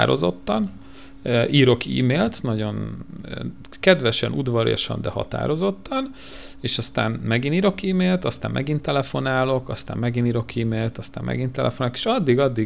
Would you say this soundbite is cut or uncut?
uncut